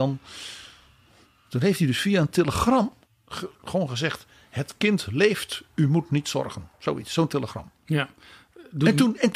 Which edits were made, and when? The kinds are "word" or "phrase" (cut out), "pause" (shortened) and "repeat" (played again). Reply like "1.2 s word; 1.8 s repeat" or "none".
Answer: 3.0 s pause; 6.7 s pause; 7.8 s pause